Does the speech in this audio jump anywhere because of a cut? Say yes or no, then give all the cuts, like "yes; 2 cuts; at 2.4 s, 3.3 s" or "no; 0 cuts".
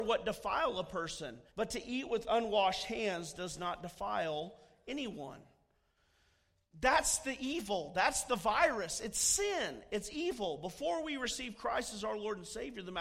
yes; 1 cut; at 1.5 s